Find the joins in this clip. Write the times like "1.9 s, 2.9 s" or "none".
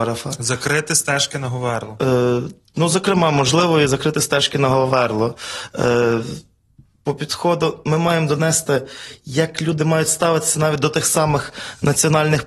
none